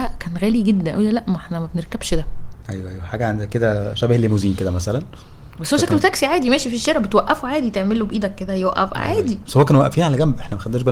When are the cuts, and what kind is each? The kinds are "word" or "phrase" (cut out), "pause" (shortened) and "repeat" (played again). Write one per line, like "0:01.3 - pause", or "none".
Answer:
0:05.5 - pause